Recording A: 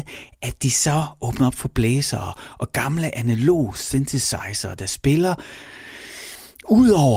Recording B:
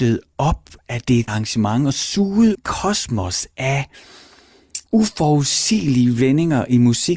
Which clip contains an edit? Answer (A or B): B